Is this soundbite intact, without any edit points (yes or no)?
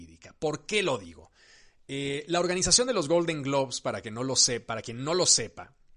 yes